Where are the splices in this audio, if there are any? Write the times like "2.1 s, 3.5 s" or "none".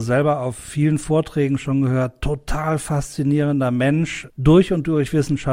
4.3 s